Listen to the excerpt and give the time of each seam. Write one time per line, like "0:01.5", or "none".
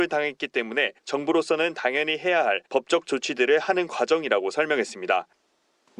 0:01.0
0:02.7